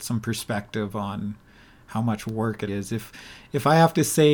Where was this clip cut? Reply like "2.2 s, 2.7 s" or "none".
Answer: 2.7 s

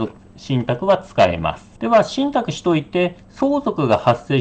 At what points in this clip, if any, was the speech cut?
1.8 s

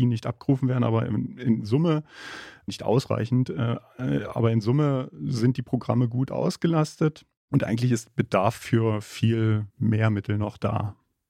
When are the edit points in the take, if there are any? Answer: 2.7 s, 9.7 s

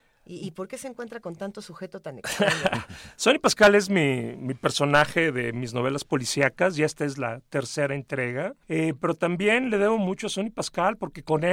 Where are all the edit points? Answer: 8.6 s

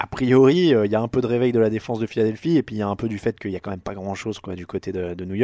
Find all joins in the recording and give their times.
none

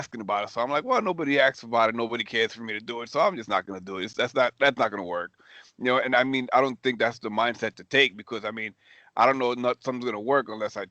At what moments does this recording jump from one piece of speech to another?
none

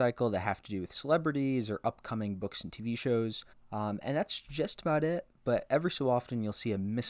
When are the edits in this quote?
3.5 s

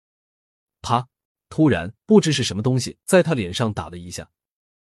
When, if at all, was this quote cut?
1.3 s, 3.0 s

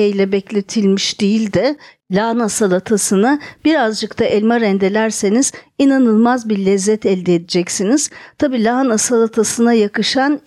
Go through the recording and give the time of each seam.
none

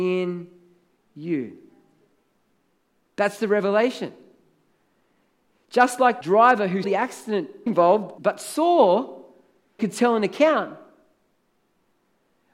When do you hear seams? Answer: 6.2 s, 6.8 s, 7.7 s, 8.2 s, 9.8 s

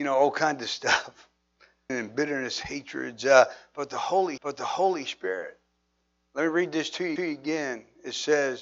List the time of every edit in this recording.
1.9 s, 4.4 s, 7.2 s

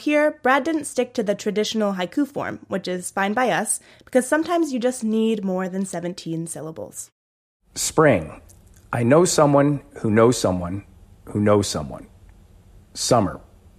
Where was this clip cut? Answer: none

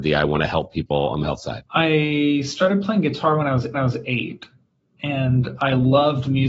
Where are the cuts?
1.2 s, 1.7 s, 3.7 s

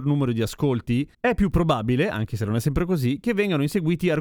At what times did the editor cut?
none

